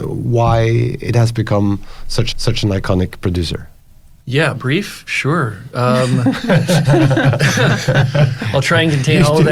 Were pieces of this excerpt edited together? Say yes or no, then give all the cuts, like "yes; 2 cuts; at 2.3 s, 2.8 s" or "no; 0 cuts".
yes; 1 cut; at 2.3 s